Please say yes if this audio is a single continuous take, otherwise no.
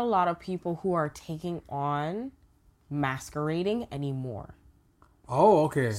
yes